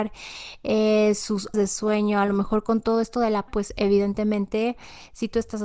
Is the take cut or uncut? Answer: cut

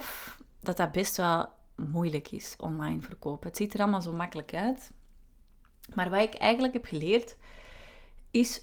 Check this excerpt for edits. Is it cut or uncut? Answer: uncut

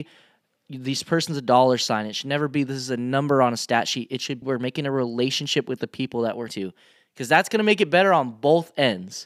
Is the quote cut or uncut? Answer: cut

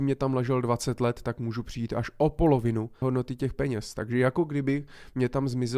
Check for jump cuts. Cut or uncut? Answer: cut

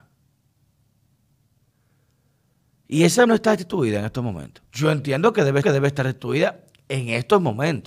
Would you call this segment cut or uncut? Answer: cut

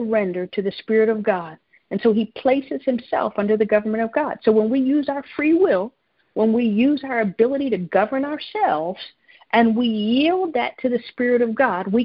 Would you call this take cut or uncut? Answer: uncut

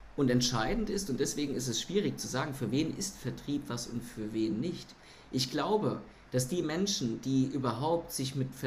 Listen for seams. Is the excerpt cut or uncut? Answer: uncut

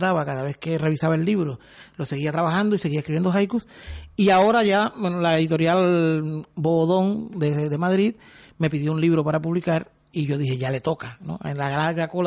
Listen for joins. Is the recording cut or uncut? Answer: uncut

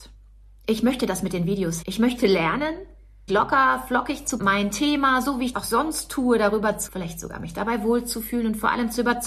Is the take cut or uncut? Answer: cut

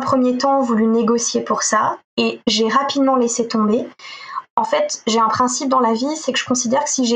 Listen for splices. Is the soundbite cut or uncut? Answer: cut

